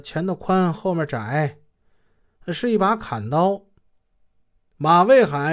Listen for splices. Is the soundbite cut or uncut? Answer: uncut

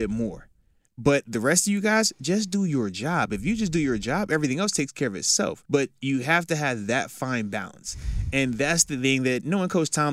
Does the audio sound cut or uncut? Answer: cut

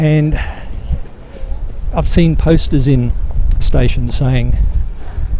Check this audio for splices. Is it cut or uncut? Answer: cut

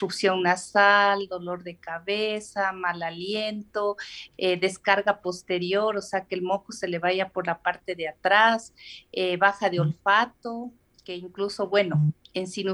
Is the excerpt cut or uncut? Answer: uncut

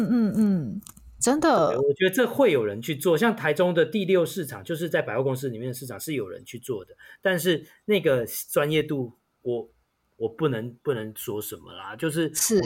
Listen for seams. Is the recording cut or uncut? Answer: uncut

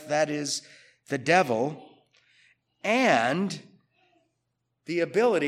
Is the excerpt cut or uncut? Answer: uncut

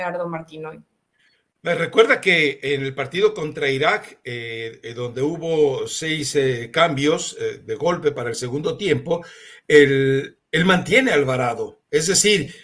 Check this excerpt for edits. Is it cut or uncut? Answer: uncut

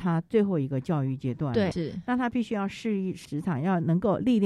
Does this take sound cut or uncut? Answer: cut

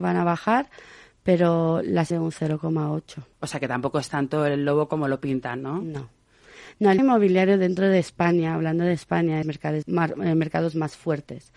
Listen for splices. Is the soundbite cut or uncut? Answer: cut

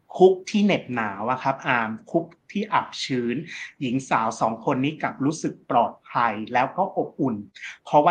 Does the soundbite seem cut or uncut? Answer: uncut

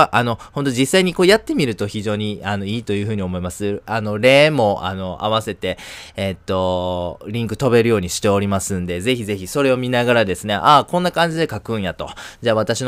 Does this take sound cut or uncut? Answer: uncut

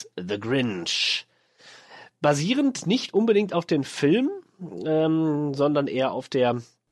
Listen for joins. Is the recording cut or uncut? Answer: uncut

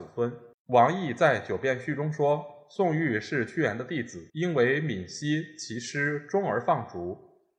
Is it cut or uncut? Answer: cut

